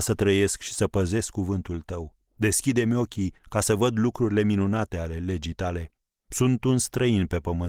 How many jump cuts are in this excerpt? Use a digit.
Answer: 3